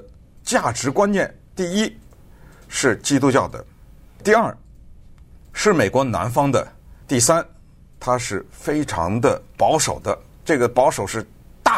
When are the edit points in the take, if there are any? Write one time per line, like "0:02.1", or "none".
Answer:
0:04.2
0:07.0